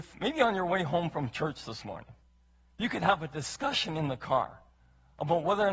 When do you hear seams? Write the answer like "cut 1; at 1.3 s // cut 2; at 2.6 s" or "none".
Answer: none